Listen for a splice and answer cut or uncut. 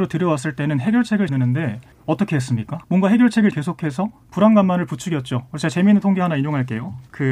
cut